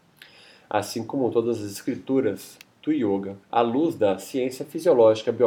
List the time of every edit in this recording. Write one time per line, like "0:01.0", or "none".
0:03.4